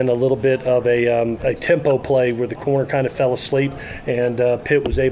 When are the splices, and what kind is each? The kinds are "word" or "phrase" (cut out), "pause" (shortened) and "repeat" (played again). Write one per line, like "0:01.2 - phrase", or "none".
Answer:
none